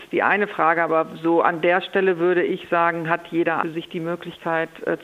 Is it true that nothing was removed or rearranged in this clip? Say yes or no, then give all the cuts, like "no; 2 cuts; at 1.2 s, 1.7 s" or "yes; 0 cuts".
no; 1 cut; at 3.6 s